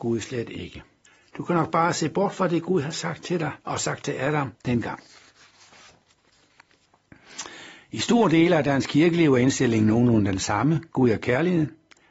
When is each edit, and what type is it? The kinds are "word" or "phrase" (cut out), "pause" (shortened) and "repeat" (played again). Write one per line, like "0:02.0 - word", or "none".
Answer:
0:01.0 - pause
0:03.6 - pause
0:04.5 - pause
0:10.9 - pause